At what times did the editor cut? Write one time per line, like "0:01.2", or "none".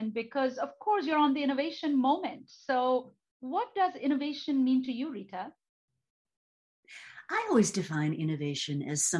none